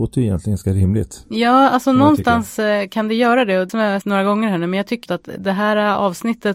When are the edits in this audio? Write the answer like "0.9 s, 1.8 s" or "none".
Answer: 3.7 s, 4.0 s, 5.1 s